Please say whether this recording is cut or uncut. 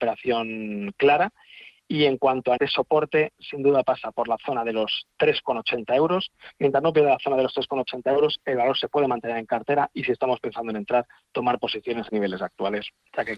cut